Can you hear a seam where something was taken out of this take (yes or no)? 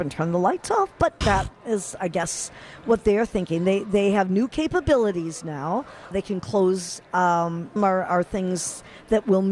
yes